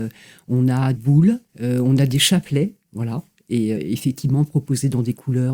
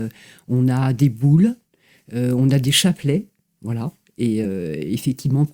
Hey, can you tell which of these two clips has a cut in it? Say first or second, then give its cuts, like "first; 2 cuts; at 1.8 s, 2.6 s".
first; 4 cuts; at 0.9 s, 1.5 s, 2.8 s, 3.7 s